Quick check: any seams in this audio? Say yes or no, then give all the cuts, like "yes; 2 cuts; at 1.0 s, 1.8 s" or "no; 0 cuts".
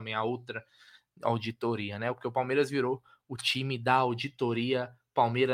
no; 0 cuts